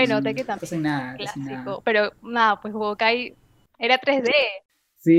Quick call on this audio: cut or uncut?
uncut